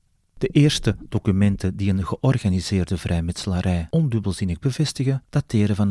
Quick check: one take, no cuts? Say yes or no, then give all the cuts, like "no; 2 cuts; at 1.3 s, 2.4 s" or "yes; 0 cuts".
yes; 0 cuts